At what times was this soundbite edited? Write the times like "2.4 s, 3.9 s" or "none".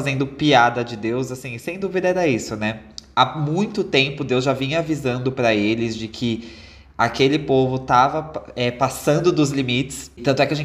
none